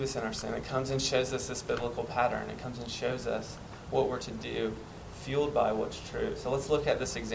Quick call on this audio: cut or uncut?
uncut